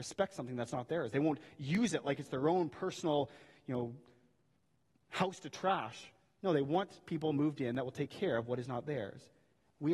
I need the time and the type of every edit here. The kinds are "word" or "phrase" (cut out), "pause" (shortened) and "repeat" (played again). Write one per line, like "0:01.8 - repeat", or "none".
none